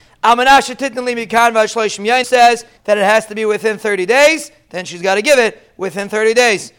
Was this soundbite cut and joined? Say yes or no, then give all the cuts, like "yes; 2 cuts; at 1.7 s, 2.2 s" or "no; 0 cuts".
yes; 2 cuts; at 2.2 s, 2.8 s